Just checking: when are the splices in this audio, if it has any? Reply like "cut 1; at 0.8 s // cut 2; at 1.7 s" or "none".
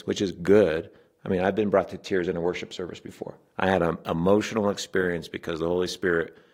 none

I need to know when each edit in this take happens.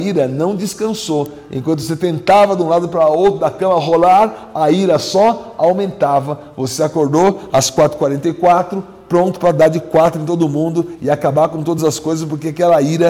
none

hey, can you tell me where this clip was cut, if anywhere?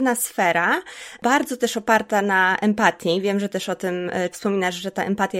cut 1; at 4.3 s

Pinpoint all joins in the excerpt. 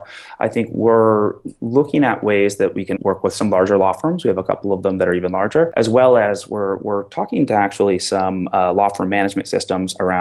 cut 1; at 3.0 s

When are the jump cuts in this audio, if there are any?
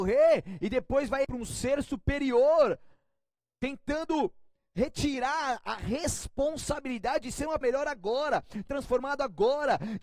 cut 1; at 1.2 s // cut 2; at 7.6 s // cut 3; at 8.7 s

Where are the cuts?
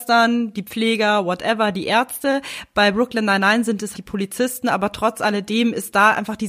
cut 1; at 3.9 s

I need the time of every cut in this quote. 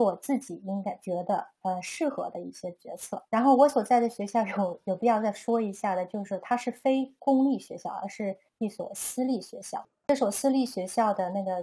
cut 1; at 3.3 s

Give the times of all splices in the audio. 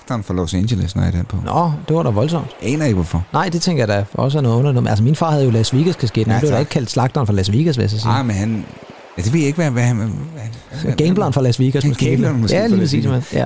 none

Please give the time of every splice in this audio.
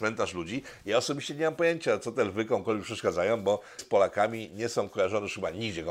cut 1; at 3.8 s

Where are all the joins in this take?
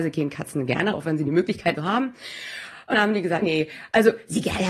cut 1; at 0.9 s // cut 2; at 1.8 s // cut 3; at 2.9 s // cut 4; at 3.4 s

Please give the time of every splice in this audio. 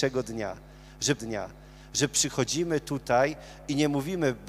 cut 1; at 1.2 s

